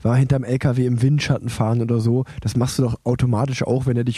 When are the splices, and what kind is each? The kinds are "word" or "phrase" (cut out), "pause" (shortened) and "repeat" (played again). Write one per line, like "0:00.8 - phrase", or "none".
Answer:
none